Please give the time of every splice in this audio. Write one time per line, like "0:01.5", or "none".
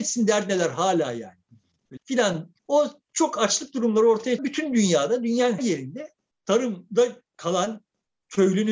0:02.0
0:02.6
0:04.4
0:05.6